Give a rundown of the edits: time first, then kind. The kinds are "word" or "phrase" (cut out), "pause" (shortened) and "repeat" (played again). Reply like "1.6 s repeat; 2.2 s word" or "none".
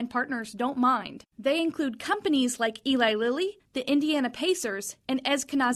none